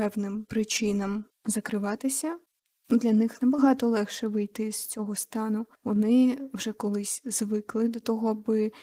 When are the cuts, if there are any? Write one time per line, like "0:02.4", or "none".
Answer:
0:01.3
0:05.7